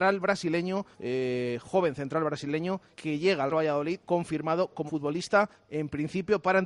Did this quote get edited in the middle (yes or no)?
yes